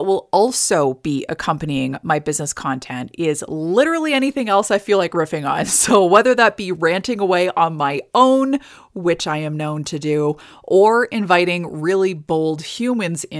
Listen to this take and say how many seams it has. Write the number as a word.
zero